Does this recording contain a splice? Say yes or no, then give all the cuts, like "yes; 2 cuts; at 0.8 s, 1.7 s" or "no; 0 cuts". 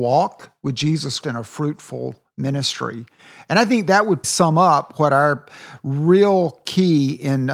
yes; 2 cuts; at 1.2 s, 4.2 s